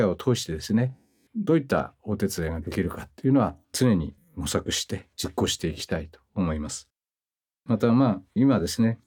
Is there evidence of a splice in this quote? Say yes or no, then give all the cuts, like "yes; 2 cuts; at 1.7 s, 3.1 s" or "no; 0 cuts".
yes; 2 cuts; at 3.6 s, 6.3 s